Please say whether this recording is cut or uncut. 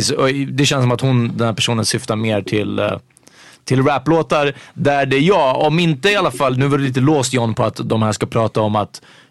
uncut